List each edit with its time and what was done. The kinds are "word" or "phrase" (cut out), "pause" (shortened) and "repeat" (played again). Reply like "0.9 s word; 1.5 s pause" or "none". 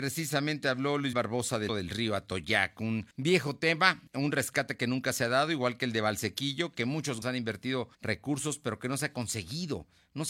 1.1 s word; 1.7 s word; 3.1 s pause; 4.1 s pause; 7.2 s word; 7.9 s pause